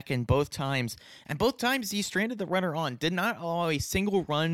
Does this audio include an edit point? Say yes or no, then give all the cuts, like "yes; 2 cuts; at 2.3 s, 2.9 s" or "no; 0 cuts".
no; 0 cuts